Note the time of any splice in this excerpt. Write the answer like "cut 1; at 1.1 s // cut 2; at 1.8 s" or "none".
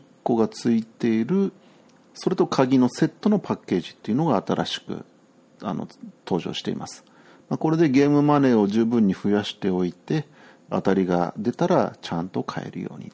none

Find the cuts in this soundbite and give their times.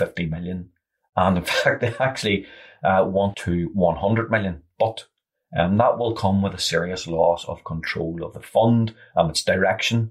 cut 1; at 3.3 s

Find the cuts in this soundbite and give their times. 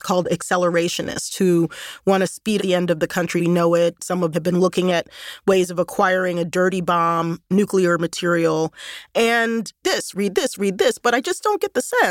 cut 1; at 2.6 s // cut 2; at 3.4 s // cut 3; at 4.3 s // cut 4; at 9.8 s

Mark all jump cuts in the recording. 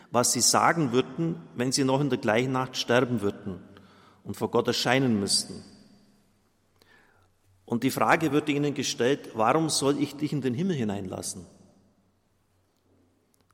none

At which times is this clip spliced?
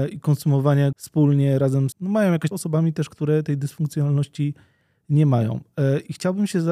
cut 1; at 0.9 s // cut 2; at 1.9 s // cut 3; at 2.5 s

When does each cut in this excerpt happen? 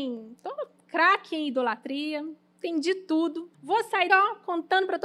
cut 1; at 3.5 s // cut 2; at 4.1 s

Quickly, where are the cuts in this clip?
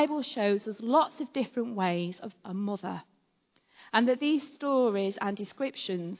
cut 1; at 2.4 s

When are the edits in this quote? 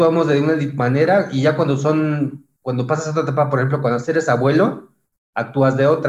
none

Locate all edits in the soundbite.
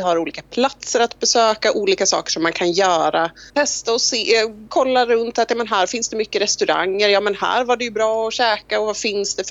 cut 1; at 3.5 s

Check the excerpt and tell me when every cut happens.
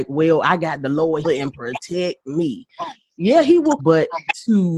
cut 1; at 1.2 s // cut 2; at 3.8 s

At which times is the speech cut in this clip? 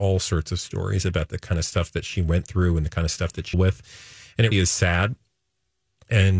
cut 1; at 3.5 s // cut 2; at 4.5 s

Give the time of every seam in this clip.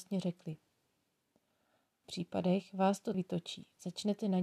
cut 1; at 2.0 s // cut 2; at 3.1 s

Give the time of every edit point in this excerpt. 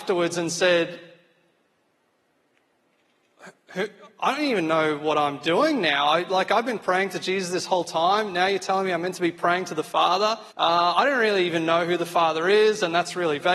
cut 1; at 10.5 s

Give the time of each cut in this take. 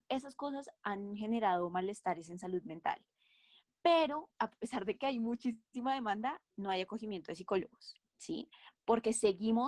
cut 1; at 4.3 s // cut 2; at 6.5 s // cut 3; at 8.1 s

